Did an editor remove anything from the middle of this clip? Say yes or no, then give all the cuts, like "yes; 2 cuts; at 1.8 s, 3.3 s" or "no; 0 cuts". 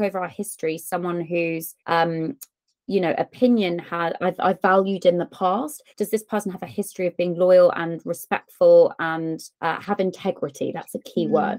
yes; 3 cuts; at 1.8 s, 5.9 s, 9.5 s